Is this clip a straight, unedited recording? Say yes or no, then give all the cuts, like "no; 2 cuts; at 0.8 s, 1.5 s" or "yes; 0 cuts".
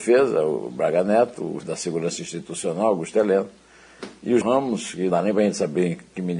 no; 3 cuts; at 1.6 s, 4.4 s, 5.1 s